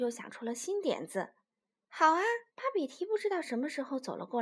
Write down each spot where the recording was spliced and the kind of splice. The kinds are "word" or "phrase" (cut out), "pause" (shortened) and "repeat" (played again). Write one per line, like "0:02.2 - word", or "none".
0:01.6 - pause
0:02.5 - pause